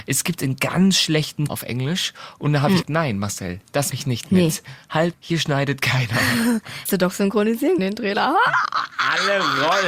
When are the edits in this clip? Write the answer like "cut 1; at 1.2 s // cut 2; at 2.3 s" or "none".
cut 1; at 1.5 s // cut 2; at 2.8 s // cut 3; at 3.9 s // cut 4; at 5.1 s // cut 5; at 6.9 s // cut 6; at 7.8 s